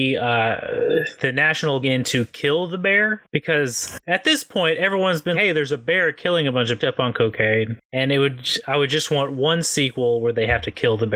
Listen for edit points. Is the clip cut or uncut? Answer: cut